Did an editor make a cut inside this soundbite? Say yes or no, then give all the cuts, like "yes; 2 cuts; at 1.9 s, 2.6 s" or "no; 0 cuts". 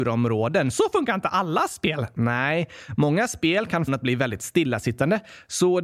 yes; 1 cut; at 3.9 s